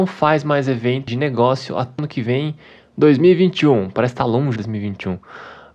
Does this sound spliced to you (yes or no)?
yes